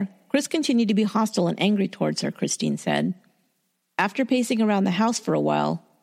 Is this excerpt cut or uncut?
uncut